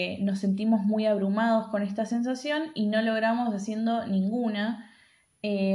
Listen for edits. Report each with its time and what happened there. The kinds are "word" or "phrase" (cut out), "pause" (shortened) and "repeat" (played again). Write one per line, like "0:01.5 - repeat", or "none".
none

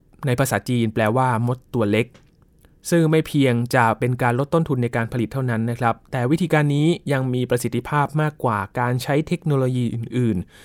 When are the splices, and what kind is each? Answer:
none

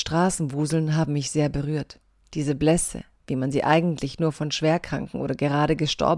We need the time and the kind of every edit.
none

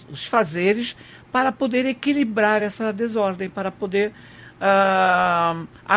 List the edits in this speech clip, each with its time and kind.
none

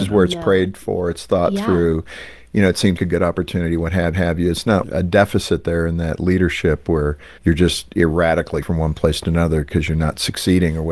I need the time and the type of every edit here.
0:03.0 - word
0:04.1 - repeat
0:04.8 - phrase
0:07.4 - pause
0:08.6 - word

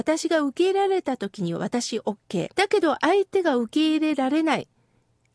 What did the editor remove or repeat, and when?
0:02.5 - pause

